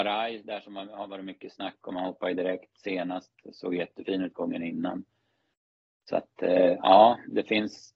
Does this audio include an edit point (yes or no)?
no